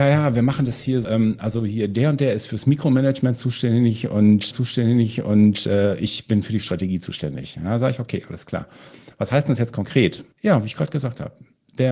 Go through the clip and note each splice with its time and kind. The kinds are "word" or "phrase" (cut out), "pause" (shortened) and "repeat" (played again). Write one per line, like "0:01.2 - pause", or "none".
0:01.0 - word
0:04.5 - repeat
0:10.3 - pause